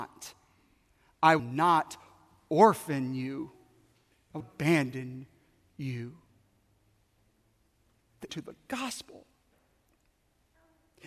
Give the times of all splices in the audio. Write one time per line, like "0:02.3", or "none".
0:01.4
0:04.4
0:08.3